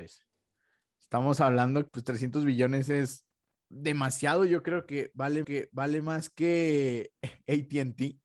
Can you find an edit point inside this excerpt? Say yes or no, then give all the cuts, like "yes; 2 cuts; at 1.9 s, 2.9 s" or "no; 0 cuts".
yes; 3 cuts; at 1.9 s, 3.4 s, 5.4 s